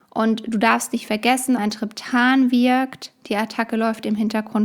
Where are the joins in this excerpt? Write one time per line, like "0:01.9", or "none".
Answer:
0:01.6